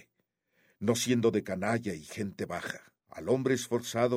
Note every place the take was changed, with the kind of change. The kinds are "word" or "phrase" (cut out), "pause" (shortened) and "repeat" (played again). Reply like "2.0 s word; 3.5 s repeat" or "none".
3.0 s pause